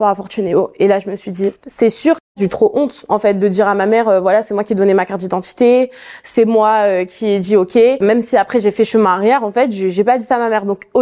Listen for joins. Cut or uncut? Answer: cut